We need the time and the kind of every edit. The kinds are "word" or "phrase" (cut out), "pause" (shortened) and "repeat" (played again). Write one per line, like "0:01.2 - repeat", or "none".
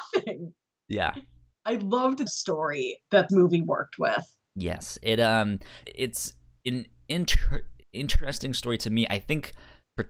0:02.3 - phrase
0:03.3 - word
0:04.5 - pause
0:05.8 - word
0:07.8 - pause